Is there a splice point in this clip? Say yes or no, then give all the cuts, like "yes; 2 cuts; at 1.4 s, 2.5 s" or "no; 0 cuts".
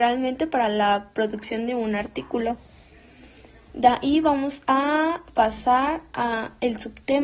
no; 0 cuts